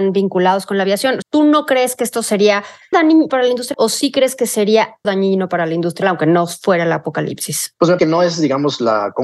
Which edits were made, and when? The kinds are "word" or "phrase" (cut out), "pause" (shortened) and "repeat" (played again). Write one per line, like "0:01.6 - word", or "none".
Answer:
0:01.2 - word
0:02.9 - word
0:03.3 - word
0:03.7 - word
0:05.0 - word
0:06.0 - word
0:08.0 - word

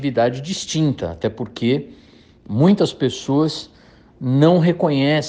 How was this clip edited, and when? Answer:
none

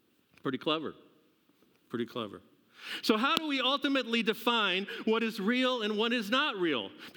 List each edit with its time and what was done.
none

